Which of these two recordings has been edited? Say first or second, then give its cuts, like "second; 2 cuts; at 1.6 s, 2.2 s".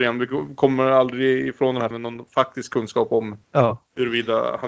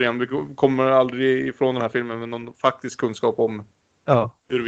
first; 2 cuts; at 1.9 s, 3.4 s